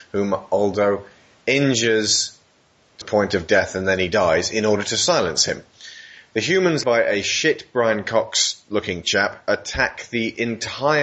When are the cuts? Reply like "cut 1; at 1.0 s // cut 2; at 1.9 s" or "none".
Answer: cut 1; at 1.3 s // cut 2; at 3.0 s // cut 3; at 6.8 s

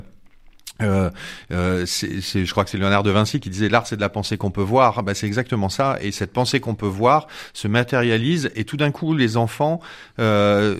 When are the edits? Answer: none

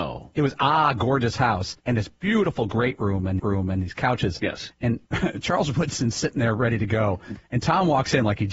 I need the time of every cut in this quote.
cut 1; at 1.8 s // cut 2; at 3.4 s // cut 3; at 5.1 s

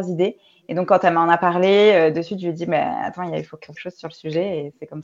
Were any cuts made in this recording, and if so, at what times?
cut 1; at 3.7 s

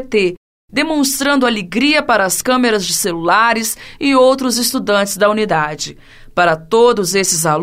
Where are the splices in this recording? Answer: none

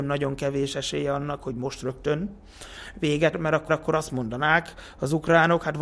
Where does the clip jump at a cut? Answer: cut 1; at 3.3 s // cut 2; at 3.7 s

